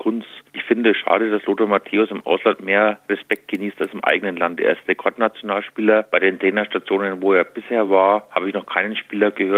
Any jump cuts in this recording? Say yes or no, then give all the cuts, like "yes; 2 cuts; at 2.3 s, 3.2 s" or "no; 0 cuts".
no; 0 cuts